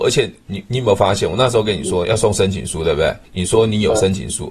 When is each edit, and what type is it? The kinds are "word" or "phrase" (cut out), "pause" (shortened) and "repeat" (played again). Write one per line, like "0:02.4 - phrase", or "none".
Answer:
0:03.2 - pause